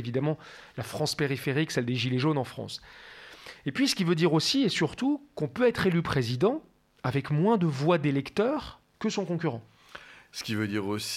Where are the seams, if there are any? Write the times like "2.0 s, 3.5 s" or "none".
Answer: none

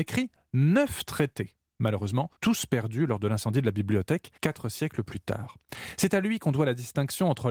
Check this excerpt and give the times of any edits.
2.4 s, 4.4 s

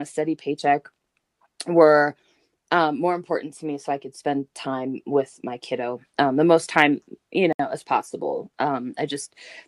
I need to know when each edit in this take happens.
none

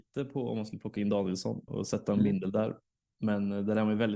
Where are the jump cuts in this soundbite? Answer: 1.7 s

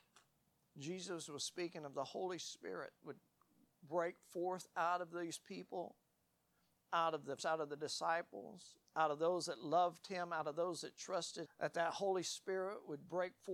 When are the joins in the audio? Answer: 7.4 s, 11.5 s

